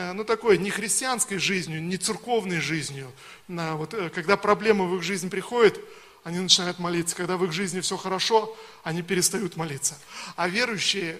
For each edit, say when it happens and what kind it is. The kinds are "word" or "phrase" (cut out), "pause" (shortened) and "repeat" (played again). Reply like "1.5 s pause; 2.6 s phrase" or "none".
none